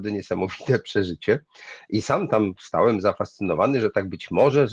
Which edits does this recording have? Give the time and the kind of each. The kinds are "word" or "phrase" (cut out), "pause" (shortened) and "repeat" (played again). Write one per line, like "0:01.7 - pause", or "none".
none

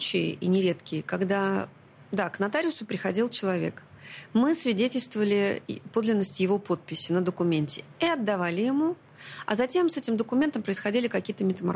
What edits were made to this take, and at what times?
none

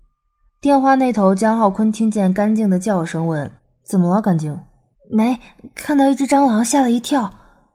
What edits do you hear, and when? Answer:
0:03.6 - pause
0:04.9 - pause

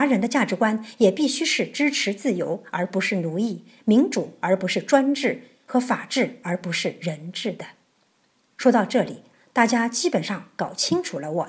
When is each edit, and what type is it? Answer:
none

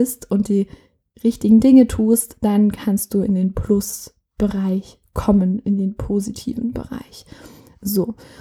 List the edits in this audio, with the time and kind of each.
none

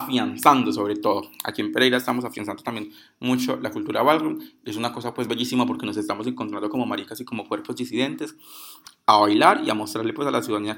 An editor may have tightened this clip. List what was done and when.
none

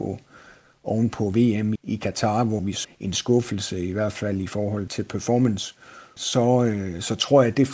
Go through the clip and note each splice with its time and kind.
0:01.8 - word
0:02.8 - word
0:04.9 - word
0:06.2 - word

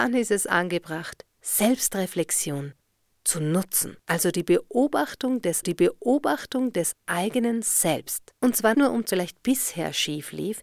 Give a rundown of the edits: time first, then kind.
0:01.3 - pause
0:04.0 - pause
0:05.6 - repeat
0:08.4 - pause
0:08.7 - word
0:09.1 - phrase

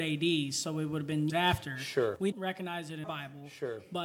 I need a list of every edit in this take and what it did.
0:01.3 - word
0:02.3 - word
0:03.0 - word

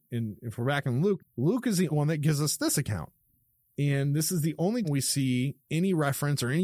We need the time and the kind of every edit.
0:01.2 - word
0:01.9 - word
0:04.8 - word

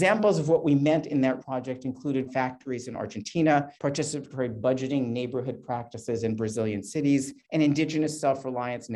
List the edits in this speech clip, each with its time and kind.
0:01.4 - word
0:02.2 - word
0:03.8 - pause
0:07.4 - pause

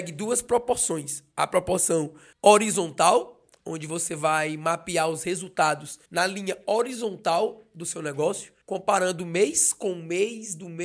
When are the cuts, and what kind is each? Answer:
0:02.3 - pause
0:06.1 - pause
0:08.6 - pause

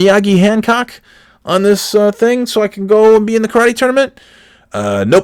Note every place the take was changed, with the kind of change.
none

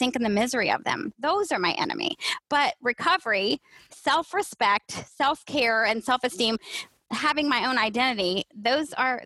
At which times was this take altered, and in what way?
none

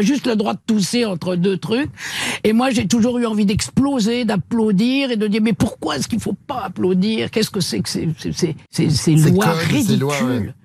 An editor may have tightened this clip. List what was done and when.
0:08.6 - pause

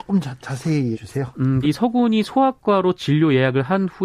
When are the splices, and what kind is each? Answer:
0:00.9 - word
0:01.6 - word

